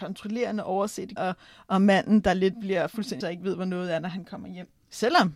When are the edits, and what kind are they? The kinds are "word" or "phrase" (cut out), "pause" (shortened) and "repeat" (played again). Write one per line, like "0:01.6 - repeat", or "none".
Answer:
0:01.2 - word
0:02.5 - word
0:03.2 - word